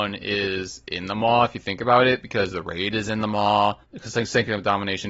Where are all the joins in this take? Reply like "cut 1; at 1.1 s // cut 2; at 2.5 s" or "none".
cut 1; at 3.8 s